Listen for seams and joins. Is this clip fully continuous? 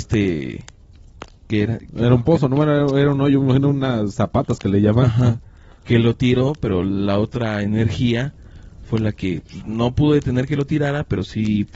yes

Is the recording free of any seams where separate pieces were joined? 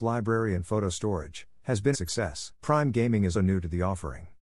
no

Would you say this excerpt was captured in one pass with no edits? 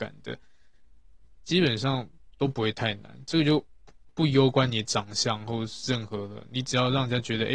no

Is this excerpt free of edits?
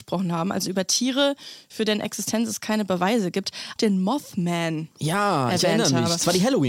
no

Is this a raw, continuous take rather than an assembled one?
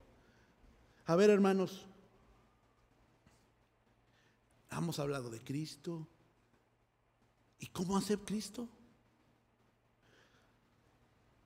no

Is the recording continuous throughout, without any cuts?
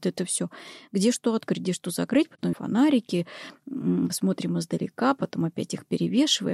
no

